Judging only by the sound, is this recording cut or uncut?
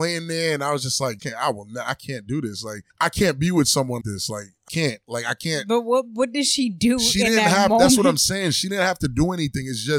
cut